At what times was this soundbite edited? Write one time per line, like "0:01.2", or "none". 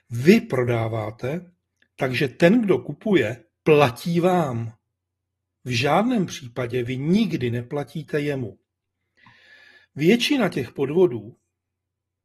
none